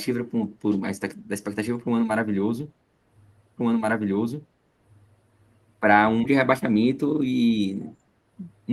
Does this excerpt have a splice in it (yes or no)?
yes